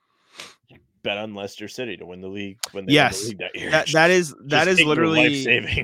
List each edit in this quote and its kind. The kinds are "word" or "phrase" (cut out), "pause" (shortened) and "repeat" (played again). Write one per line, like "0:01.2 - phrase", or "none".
none